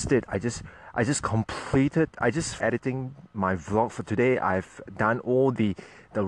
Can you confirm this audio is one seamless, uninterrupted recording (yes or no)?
no